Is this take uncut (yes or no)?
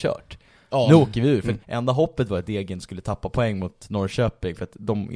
no